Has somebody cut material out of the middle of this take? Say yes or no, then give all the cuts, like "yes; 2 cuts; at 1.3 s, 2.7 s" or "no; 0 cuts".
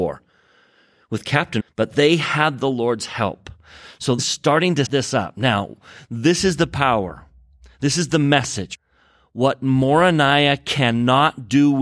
yes; 3 cuts; at 1.6 s, 4.2 s, 4.9 s